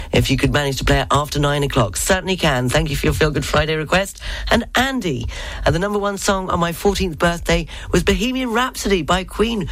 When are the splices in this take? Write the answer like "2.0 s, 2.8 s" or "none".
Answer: none